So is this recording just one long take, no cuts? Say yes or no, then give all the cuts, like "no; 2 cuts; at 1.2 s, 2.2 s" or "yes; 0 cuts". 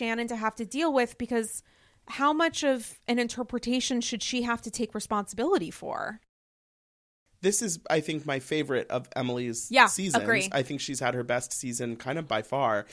yes; 0 cuts